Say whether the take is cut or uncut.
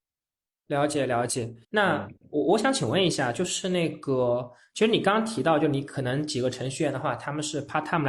cut